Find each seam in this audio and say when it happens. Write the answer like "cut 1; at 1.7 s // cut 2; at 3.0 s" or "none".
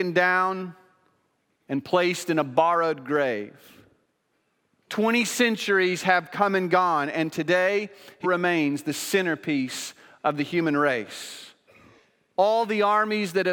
cut 1; at 8.2 s